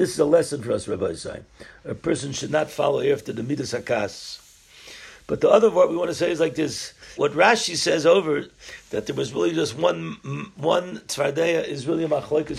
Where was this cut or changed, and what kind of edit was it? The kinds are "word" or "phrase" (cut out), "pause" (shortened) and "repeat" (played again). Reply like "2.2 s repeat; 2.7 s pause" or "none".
7.2 s word